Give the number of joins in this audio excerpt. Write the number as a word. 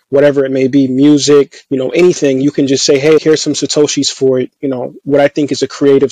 two